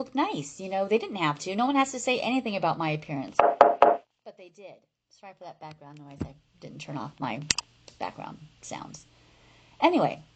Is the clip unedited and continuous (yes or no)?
yes